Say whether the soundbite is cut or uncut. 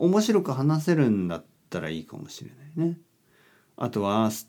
uncut